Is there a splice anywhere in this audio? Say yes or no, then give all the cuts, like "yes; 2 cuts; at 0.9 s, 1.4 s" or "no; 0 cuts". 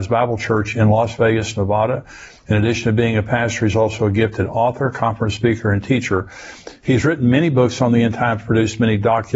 no; 0 cuts